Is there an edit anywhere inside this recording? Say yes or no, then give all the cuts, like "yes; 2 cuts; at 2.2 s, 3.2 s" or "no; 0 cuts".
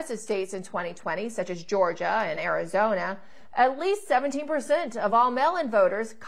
no; 0 cuts